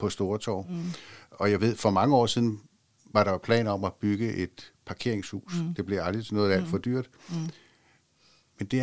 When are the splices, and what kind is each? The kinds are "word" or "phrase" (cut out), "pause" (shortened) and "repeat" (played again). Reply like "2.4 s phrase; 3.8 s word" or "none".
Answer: none

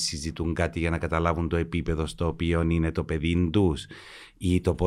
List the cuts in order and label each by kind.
none

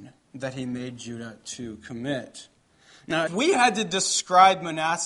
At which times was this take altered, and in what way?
3.3 s phrase

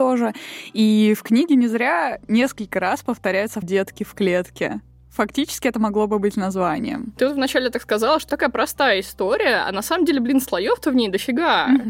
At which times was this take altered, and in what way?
3.6 s word; 8.3 s word

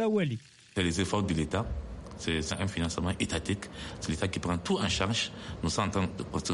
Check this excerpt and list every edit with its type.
2.5 s word

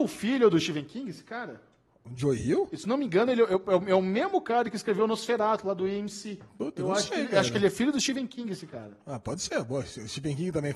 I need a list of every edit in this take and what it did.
6.5 s pause

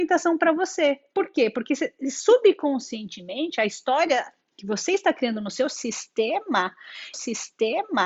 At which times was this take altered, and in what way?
7.1 s repeat

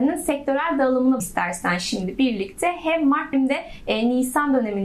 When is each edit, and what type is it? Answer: 1.2 s word; 3.3 s word

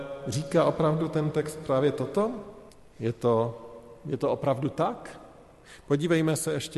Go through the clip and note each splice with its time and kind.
2.7 s pause

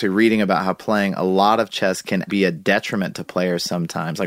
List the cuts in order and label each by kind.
2.3 s word

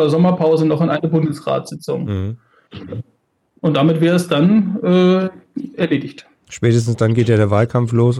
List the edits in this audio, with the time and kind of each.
none

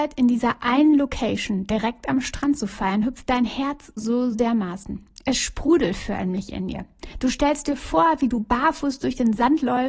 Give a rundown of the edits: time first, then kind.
4.0 s word; 4.3 s word

